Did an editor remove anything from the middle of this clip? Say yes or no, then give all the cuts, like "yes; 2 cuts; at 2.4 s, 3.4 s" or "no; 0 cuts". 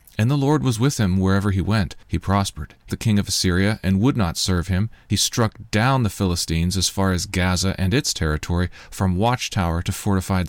yes; 1 cut; at 2.9 s